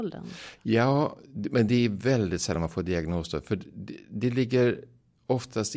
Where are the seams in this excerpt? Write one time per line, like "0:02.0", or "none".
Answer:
none